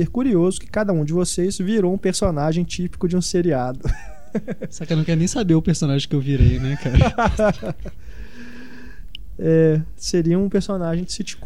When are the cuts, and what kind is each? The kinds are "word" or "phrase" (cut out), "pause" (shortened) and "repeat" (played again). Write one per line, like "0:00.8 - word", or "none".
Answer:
none